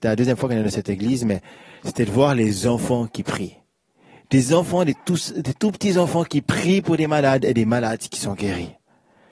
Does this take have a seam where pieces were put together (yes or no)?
no